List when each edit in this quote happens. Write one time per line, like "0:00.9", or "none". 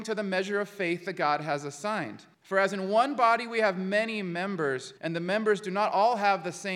0:02.3
0:05.0